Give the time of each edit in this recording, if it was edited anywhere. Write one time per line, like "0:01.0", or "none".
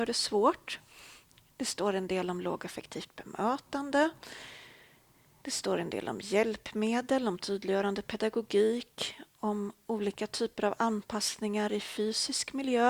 none